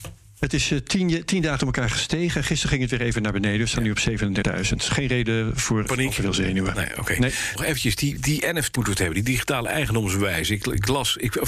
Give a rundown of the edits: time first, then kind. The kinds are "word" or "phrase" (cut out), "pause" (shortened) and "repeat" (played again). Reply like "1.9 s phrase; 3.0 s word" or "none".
1.6 s word; 4.4 s word; 5.9 s word; 7.6 s word; 8.2 s word; 8.8 s word